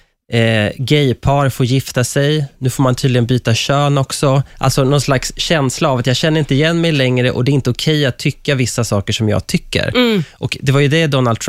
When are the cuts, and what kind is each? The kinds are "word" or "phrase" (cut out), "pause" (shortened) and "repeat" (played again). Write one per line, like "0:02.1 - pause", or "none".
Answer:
0:04.5 - pause

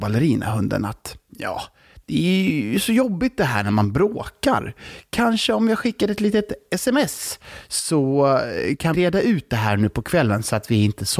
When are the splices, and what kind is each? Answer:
0:08.9 - word

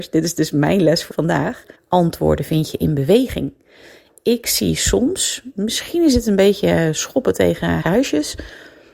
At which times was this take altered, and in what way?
0:01.1 - word
0:01.7 - pause
0:07.8 - word

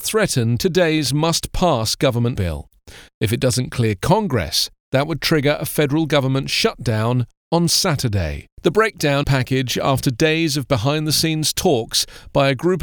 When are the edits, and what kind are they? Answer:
0:02.4 - word
0:08.5 - pause
0:09.2 - phrase

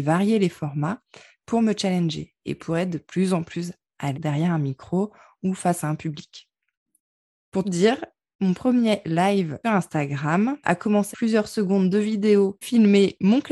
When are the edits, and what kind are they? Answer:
0:04.1 - word
0:07.6 - word
0:09.6 - word
0:10.6 - word
0:11.1 - word
0:12.6 - word

